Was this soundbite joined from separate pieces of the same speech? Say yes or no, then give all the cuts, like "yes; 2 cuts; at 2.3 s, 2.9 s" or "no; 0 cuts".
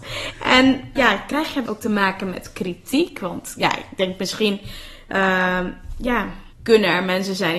yes; 3 cuts; at 1.0 s, 1.7 s, 6.5 s